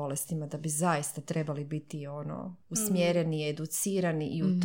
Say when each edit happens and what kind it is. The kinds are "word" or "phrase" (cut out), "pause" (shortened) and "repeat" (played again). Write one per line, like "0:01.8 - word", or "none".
0:02.6 - pause